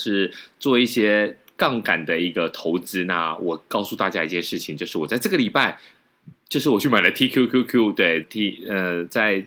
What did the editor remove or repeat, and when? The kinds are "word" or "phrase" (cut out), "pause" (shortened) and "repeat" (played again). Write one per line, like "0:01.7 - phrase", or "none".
0:08.2 - phrase